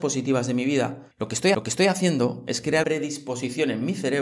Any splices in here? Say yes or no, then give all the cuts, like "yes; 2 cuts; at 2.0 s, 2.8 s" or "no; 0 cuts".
yes; 3 cuts; at 1.1 s, 1.5 s, 2.8 s